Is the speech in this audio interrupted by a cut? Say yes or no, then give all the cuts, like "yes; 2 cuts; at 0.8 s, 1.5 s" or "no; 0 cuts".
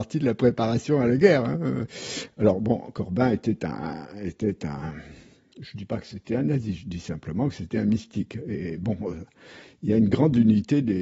no; 0 cuts